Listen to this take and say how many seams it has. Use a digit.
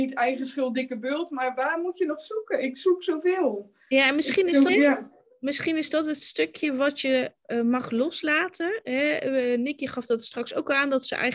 1